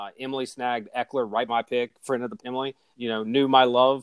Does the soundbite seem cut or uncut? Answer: cut